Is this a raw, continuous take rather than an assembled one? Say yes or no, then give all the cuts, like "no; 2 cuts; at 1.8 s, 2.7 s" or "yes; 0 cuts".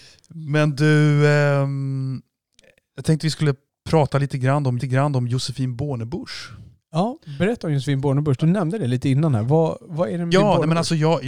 no; 3 cuts; at 3.7 s, 4.8 s, 10.3 s